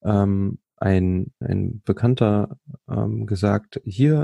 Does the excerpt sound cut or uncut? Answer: cut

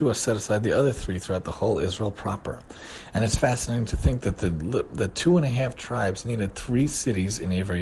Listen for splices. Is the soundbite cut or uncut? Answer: uncut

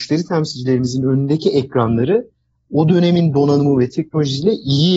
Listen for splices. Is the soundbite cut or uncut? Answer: uncut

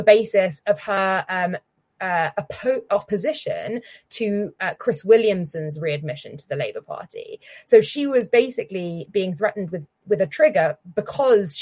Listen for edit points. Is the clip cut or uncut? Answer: uncut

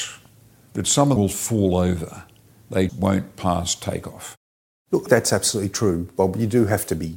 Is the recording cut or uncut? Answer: cut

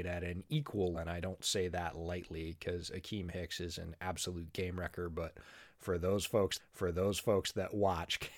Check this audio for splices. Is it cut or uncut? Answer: cut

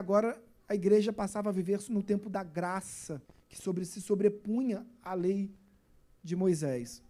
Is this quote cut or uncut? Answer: cut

